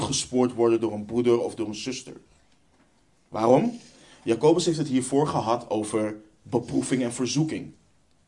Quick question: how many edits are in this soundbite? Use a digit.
0